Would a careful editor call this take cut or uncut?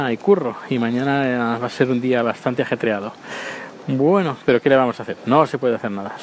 uncut